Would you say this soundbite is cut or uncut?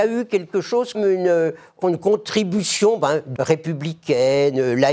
cut